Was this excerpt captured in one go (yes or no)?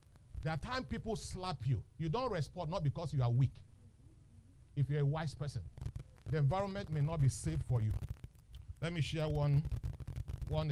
yes